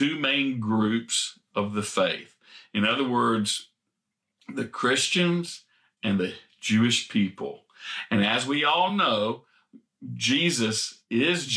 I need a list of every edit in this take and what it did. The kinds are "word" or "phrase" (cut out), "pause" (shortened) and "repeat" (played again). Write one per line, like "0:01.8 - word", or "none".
none